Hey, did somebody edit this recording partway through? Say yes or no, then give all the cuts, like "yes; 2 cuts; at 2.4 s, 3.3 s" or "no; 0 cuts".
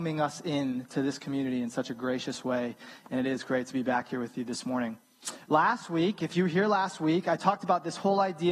no; 0 cuts